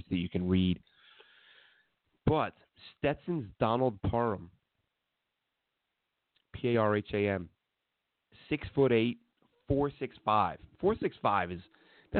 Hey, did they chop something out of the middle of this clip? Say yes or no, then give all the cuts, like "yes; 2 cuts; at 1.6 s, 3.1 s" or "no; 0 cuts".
no; 0 cuts